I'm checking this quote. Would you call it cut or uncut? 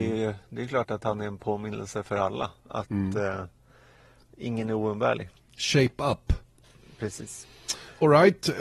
uncut